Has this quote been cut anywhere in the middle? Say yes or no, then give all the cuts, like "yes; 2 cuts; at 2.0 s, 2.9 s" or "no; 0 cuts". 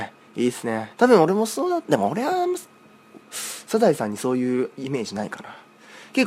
yes; 2 cuts; at 0.9 s, 3.2 s